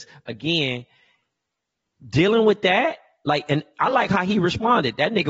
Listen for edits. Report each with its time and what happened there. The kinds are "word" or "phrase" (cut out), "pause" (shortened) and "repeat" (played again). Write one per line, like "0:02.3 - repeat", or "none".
none